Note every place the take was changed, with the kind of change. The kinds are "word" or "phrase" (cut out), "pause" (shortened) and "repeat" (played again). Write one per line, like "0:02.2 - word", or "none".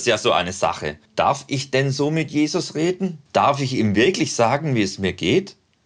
0:01.1 - pause
0:03.3 - pause